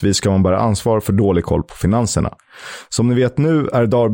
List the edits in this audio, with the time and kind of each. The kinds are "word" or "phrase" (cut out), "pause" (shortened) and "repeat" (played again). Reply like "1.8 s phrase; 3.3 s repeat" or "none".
none